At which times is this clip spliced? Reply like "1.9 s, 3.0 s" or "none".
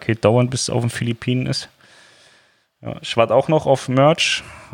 none